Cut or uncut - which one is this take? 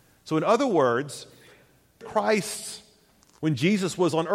cut